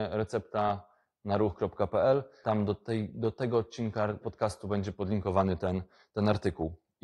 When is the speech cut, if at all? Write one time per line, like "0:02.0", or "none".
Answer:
none